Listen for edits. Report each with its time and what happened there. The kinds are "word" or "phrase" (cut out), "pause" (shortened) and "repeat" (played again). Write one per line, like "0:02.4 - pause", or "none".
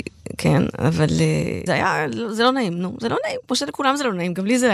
0:01.7 - word